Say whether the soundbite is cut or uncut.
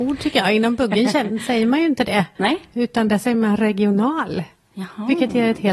uncut